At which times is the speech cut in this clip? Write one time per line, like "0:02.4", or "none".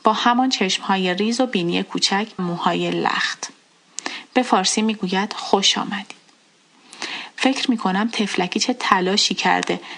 0:02.4